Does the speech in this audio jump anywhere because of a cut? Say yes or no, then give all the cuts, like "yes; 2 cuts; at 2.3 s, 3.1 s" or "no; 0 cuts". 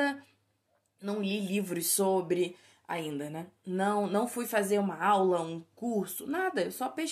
no; 0 cuts